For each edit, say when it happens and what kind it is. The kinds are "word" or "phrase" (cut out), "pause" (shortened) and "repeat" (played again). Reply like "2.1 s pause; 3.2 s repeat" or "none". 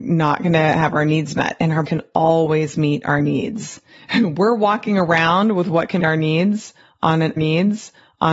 1.8 s word; 6.0 s word; 7.4 s repeat